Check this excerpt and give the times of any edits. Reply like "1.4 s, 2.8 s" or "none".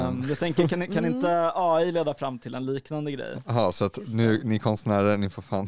none